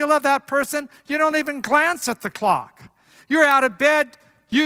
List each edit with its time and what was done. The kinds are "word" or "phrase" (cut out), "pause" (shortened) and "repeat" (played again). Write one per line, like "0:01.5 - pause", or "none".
none